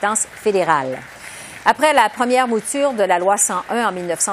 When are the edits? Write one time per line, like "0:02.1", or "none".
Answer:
none